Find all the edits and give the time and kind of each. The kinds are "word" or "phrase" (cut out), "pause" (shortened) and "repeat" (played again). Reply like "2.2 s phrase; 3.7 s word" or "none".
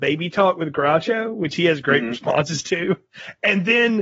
none